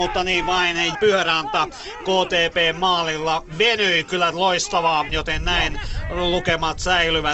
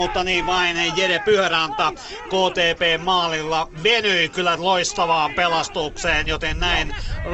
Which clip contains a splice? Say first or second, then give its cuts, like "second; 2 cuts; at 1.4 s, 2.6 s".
first; 2 cuts; at 0.9 s, 5.1 s